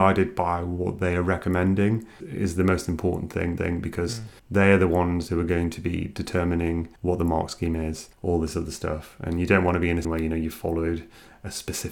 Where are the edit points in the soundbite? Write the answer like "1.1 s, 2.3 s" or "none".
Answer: 2.2 s, 3.6 s, 4.4 s, 7.0 s, 8.1 s, 10.0 s